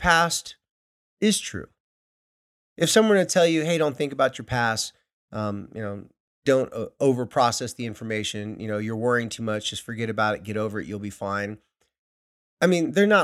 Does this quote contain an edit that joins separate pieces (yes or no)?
no